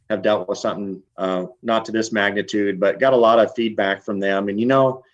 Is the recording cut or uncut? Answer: cut